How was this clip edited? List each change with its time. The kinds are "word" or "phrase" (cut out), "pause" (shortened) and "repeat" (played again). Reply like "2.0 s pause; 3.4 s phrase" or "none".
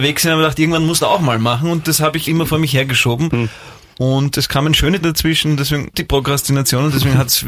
1.0 s word; 2.3 s word; 5.0 s word; 5.9 s word